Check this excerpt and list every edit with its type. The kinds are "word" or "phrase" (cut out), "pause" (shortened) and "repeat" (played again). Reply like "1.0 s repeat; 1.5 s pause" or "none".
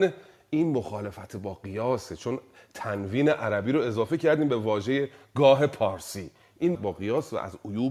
6.7 s phrase